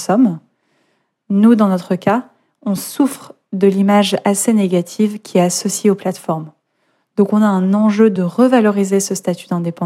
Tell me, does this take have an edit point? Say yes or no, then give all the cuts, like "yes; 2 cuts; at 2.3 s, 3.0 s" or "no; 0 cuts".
no; 0 cuts